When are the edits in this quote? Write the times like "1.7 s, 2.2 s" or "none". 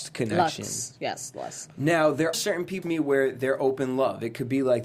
2.3 s, 2.8 s